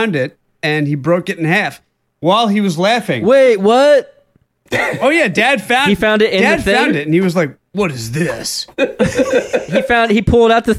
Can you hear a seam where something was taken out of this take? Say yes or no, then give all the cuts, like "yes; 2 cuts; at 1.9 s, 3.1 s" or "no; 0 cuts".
no; 0 cuts